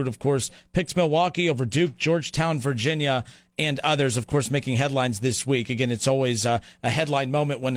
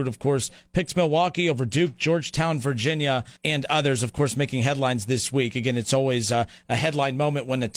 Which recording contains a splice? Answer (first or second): second